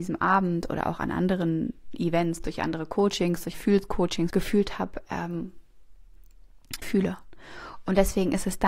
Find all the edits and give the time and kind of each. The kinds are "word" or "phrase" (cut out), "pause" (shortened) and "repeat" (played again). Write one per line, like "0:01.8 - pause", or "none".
0:03.5 - word
0:04.3 - word
0:06.8 - word